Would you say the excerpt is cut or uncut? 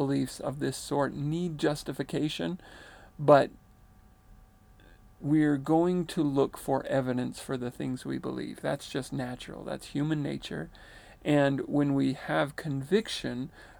uncut